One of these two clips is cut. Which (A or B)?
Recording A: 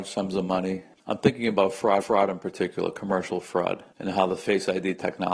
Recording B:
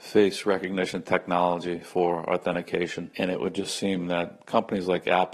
A